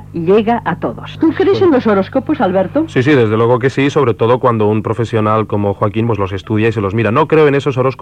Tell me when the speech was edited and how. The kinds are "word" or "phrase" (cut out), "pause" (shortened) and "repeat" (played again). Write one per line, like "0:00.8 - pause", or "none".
0:06.1 - word